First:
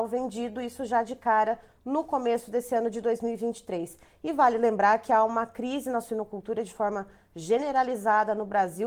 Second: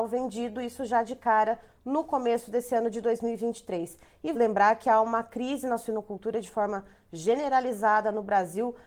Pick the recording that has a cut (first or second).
second